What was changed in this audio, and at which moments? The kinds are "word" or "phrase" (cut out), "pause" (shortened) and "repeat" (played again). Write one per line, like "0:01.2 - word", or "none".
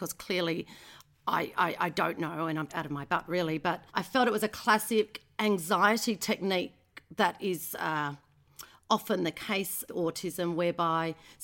0:02.7 - word
0:03.9 - pause
0:09.9 - word